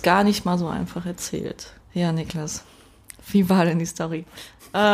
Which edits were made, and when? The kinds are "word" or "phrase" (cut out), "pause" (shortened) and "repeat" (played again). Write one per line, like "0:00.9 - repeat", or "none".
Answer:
0:01.8 - pause